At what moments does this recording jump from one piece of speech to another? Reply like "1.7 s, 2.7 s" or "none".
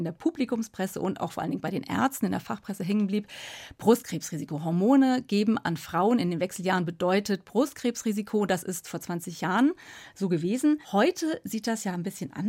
10.8 s